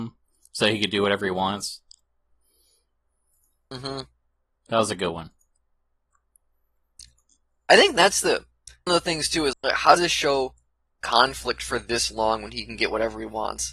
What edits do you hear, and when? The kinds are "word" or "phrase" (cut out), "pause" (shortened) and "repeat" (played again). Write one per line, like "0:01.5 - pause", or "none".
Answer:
0:08.9 - word
0:09.5 - word
0:10.0 - word
0:11.0 - word